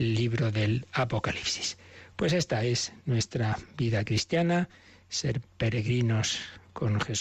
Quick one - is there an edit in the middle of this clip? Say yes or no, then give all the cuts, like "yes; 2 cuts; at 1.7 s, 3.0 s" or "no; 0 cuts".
no; 0 cuts